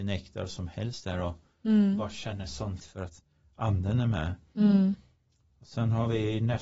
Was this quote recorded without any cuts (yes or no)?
no